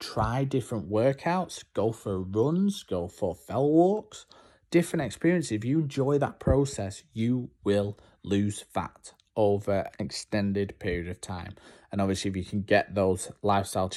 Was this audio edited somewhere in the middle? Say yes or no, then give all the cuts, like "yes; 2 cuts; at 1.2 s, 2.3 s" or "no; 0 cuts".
yes; 1 cut; at 9.9 s